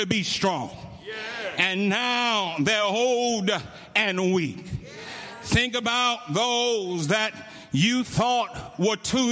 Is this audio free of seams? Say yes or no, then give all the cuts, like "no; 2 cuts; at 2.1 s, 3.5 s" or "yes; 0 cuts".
yes; 0 cuts